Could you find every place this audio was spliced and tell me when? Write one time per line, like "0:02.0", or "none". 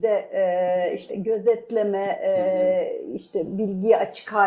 0:01.1